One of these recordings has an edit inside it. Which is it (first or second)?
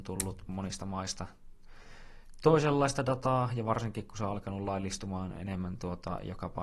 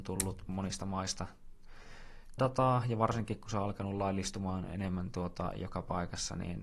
second